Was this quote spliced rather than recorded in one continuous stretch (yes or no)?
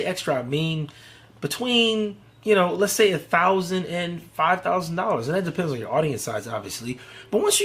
no